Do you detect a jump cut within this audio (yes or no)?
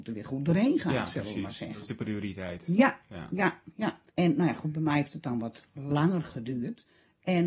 yes